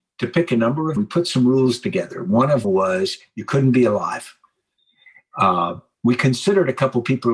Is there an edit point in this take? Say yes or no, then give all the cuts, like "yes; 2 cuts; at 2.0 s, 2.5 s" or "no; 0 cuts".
yes; 3 cuts; at 1.0 s, 2.6 s, 5.9 s